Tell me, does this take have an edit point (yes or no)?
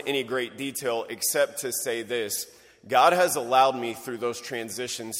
no